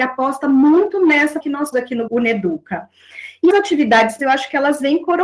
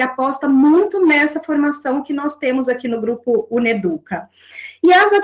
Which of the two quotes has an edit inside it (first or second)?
first